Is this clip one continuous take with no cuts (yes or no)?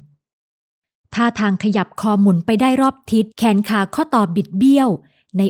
no